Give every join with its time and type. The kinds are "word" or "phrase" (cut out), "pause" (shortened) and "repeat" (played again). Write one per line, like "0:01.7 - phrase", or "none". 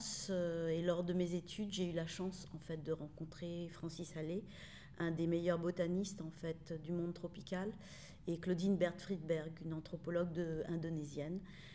none